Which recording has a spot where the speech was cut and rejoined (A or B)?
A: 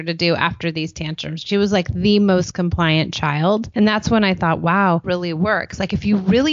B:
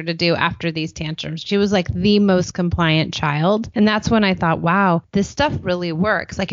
A